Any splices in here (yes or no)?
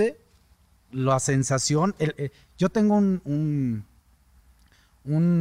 no